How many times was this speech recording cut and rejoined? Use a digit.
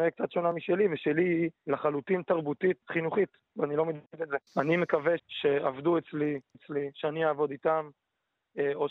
6